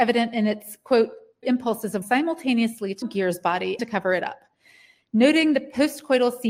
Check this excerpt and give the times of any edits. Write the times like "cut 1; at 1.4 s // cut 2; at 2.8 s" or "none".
cut 1; at 1.4 s // cut 2; at 2.0 s // cut 3; at 3.0 s // cut 4; at 3.8 s